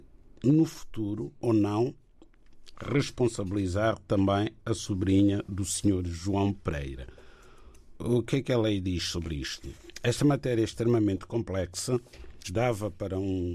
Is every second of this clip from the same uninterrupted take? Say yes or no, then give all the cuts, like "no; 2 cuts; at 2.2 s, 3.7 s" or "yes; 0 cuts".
no; 2 cuts; at 1.4 s, 12.4 s